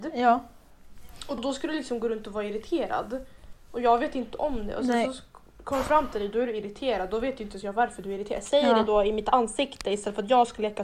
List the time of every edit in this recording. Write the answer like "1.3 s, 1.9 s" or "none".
1.4 s